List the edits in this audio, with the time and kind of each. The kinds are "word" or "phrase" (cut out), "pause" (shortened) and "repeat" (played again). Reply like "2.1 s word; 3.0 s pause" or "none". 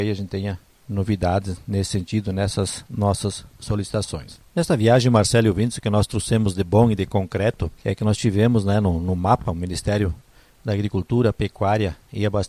none